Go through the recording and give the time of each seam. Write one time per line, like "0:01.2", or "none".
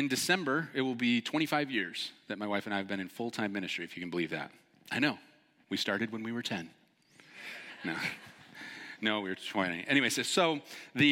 none